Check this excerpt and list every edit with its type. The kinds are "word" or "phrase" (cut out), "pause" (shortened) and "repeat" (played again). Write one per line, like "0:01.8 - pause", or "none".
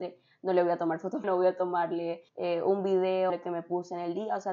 0:01.2 - phrase
0:02.3 - pause
0:03.3 - word